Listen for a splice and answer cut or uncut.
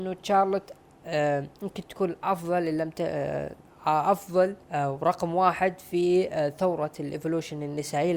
cut